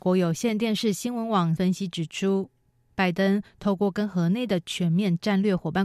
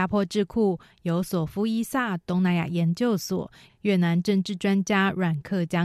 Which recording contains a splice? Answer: first; 1 cut; at 1.6 s

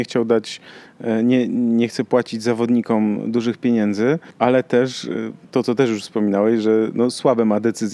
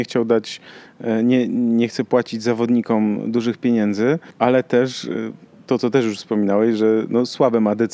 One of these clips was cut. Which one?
first; 1 cut; at 5.4 s

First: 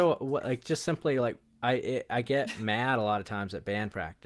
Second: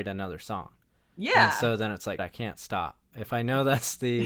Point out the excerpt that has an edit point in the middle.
second; 1 cut; at 2.2 s

